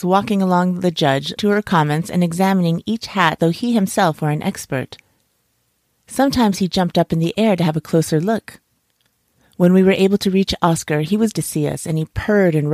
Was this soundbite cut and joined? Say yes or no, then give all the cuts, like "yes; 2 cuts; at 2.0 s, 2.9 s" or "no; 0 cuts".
yes; 3 cuts; at 1.4 s, 3.4 s, 11.3 s